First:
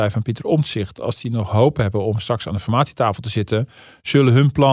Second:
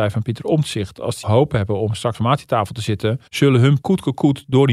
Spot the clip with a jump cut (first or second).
second